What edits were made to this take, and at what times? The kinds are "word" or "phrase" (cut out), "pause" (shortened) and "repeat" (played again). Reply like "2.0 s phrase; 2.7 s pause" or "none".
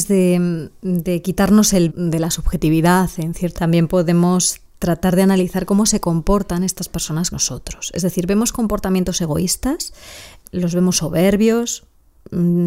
1.9 s word; 3.6 s word; 7.3 s word; 10.4 s word